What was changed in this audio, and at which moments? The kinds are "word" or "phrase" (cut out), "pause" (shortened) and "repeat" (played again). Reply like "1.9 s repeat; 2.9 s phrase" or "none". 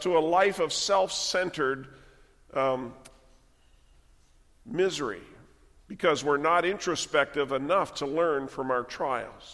none